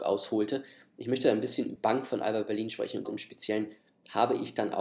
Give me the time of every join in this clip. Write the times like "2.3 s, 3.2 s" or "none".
1.8 s, 3.0 s